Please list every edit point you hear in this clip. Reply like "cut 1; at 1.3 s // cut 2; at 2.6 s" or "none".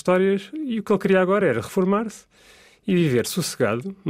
none